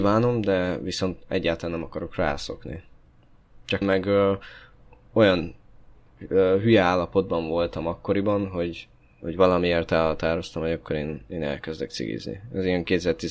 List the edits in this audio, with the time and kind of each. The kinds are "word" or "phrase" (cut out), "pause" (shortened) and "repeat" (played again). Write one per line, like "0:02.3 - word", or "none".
0:03.8 - phrase